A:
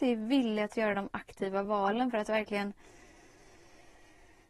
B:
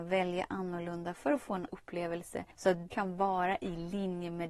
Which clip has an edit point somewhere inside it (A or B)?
B